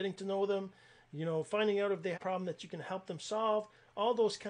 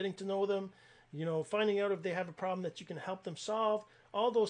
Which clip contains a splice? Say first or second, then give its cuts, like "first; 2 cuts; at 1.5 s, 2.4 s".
first; 1 cut; at 2.1 s